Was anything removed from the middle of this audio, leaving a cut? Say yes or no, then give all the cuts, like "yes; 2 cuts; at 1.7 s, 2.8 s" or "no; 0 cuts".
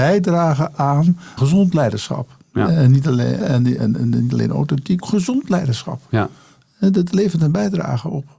yes; 4 cuts; at 1.4 s, 3.4 s, 3.8 s, 5.0 s